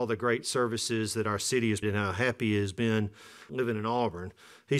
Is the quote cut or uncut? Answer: cut